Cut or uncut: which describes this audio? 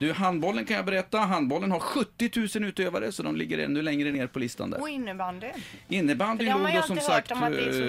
uncut